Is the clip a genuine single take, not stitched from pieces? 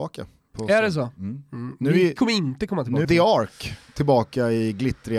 no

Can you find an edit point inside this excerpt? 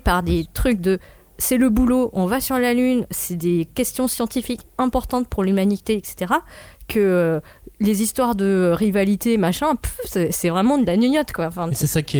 no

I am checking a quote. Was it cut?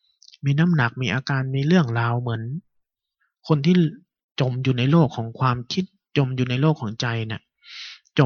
no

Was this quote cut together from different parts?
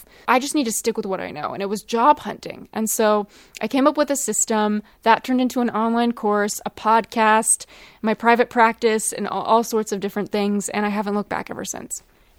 no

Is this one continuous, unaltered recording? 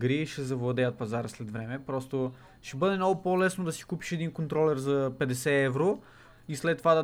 yes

